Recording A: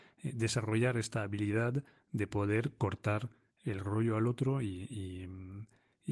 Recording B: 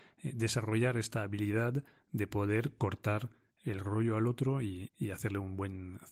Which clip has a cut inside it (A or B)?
B